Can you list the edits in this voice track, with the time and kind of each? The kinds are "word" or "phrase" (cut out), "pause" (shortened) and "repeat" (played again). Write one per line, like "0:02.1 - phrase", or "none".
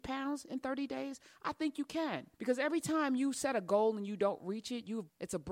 0:02.3 - pause